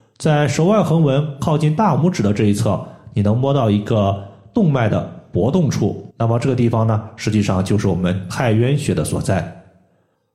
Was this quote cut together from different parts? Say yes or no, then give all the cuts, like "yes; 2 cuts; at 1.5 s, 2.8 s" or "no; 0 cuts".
yes; 1 cut; at 6.1 s